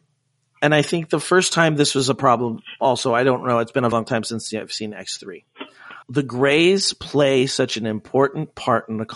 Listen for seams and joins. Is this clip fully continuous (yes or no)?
no